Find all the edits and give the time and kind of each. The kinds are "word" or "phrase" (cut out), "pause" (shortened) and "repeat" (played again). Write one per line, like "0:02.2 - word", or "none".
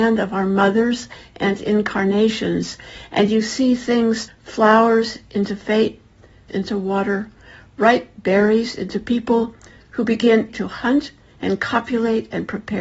0:04.3 - word
0:06.5 - word
0:10.5 - word